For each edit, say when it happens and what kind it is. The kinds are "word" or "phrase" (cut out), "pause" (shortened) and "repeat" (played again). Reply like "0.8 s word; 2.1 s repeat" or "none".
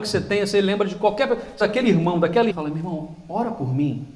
1.6 s word; 2.5 s word